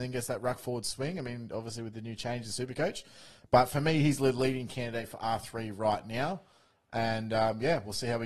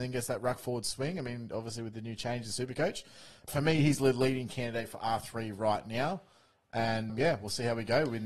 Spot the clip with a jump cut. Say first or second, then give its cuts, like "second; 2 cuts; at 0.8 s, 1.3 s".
second; 2 cuts; at 3.5 s, 7.1 s